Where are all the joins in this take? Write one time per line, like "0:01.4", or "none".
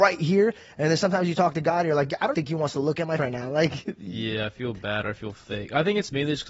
0:02.3
0:03.2